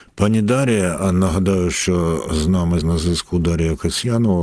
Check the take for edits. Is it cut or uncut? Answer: cut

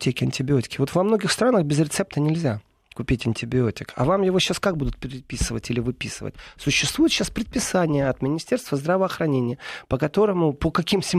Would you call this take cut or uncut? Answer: uncut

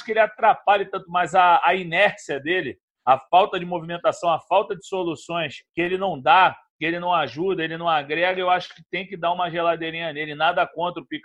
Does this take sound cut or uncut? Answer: cut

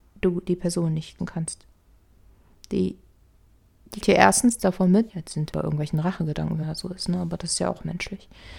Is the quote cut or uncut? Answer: cut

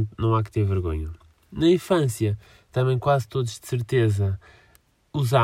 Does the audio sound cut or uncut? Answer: uncut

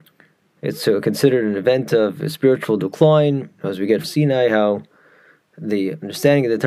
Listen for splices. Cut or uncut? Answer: cut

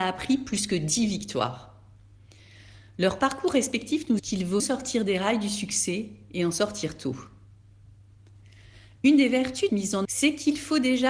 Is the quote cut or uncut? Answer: cut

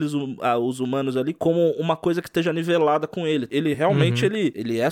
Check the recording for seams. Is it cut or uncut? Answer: uncut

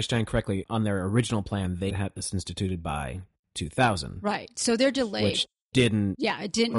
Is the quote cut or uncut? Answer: cut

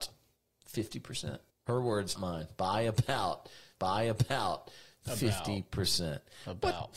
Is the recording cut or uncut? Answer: cut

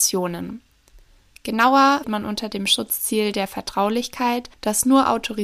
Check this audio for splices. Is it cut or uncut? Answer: cut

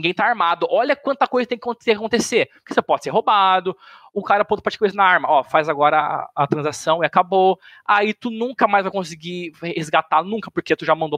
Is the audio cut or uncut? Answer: uncut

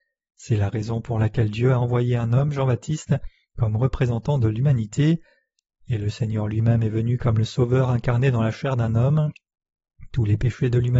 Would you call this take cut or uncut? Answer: uncut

